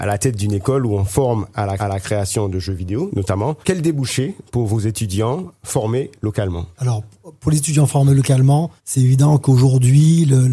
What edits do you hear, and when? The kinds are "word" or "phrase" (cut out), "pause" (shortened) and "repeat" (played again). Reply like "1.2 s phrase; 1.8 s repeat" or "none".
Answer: 1.8 s repeat; 3.6 s pause; 6.7 s pause; 8.8 s pause